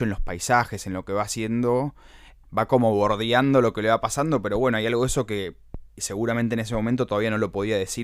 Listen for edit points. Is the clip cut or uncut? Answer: cut